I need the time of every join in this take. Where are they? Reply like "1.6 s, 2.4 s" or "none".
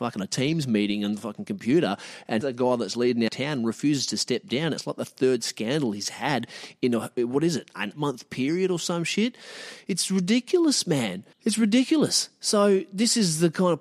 2.4 s, 3.3 s, 7.9 s, 11.3 s